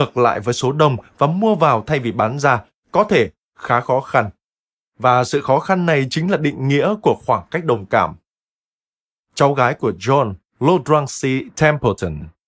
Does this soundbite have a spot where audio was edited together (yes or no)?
no